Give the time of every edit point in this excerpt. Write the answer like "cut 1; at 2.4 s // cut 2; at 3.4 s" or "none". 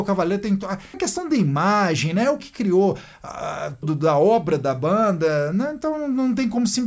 cut 1; at 0.9 s // cut 2; at 2.4 s // cut 3; at 3.8 s